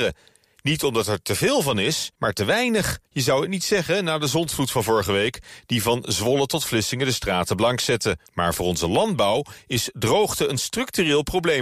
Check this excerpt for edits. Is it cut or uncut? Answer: cut